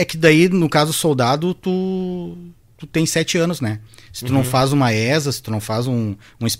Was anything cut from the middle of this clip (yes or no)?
no